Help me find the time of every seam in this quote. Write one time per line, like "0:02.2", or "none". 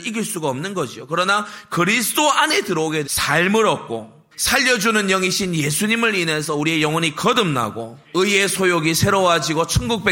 0:03.0
0:04.3
0:08.0